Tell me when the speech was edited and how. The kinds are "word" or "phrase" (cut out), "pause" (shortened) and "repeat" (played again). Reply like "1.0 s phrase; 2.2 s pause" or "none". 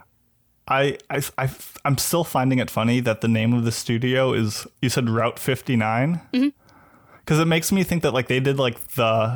none